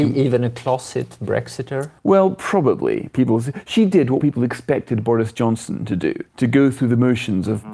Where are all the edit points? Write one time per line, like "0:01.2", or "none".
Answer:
0:02.0
0:04.2
0:06.3